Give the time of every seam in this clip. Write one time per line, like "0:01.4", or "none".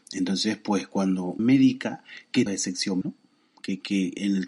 0:01.4
0:02.5
0:03.0